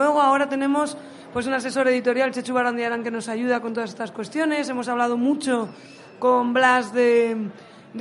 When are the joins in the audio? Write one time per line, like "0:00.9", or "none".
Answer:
none